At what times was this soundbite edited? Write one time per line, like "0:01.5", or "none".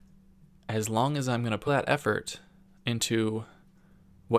0:01.7